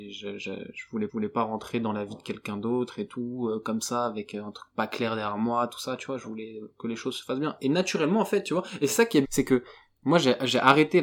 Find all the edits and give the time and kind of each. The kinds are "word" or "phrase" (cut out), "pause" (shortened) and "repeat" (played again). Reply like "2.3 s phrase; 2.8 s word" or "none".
1.1 s repeat; 9.2 s word